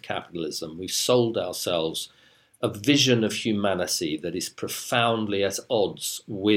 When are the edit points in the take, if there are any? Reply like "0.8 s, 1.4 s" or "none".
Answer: none